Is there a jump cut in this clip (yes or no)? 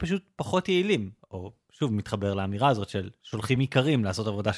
no